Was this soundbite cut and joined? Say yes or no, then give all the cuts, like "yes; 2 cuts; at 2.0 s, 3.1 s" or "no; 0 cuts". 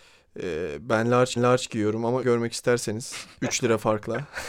yes; 2 cuts; at 1.4 s, 2.2 s